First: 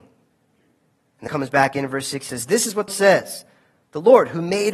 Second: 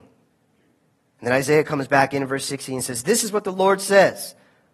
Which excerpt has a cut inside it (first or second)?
first